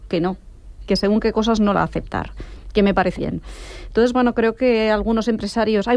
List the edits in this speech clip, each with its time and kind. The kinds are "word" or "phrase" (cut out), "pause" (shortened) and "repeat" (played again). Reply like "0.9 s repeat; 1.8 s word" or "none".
1.7 s word; 3.2 s word